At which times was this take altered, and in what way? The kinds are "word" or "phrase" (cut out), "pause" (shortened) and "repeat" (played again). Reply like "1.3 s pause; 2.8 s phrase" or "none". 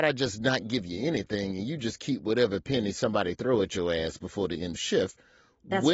4.7 s phrase

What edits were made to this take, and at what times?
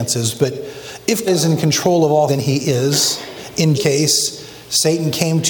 1.3 s word; 2.3 s word; 3.7 s word

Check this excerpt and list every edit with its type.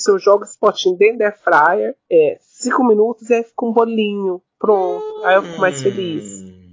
4.5 s pause

